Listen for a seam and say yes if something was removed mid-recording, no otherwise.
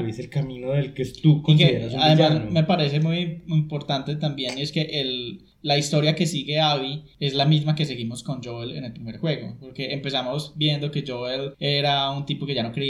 no